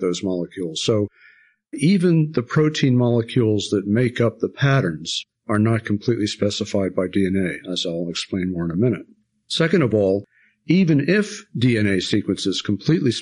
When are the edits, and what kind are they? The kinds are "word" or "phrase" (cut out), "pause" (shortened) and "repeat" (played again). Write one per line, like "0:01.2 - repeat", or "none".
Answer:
none